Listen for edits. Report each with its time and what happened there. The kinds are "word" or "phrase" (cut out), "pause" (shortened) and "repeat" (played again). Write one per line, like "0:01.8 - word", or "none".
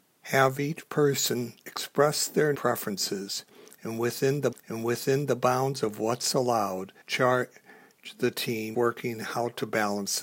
0:01.6 - pause
0:02.5 - phrase
0:04.5 - repeat
0:07.0 - pause
0:08.7 - word